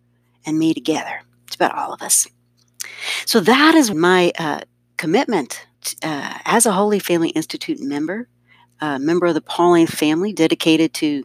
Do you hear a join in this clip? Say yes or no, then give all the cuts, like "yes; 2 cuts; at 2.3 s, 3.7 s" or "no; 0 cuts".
yes; 2 cuts; at 3.9 s, 5.7 s